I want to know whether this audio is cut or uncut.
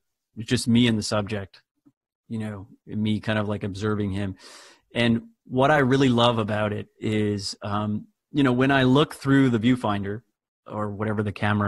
uncut